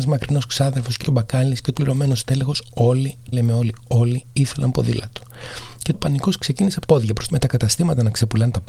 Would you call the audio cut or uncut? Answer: cut